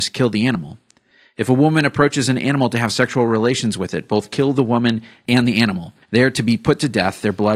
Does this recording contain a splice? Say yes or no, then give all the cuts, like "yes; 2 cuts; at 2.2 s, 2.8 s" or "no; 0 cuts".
yes; 1 cut; at 6.0 s